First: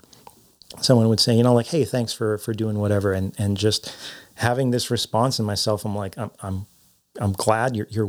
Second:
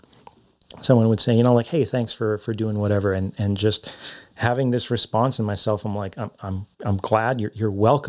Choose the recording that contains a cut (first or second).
second